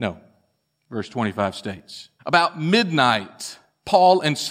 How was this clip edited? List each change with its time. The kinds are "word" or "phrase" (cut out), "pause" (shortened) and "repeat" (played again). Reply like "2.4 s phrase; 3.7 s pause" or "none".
2.2 s pause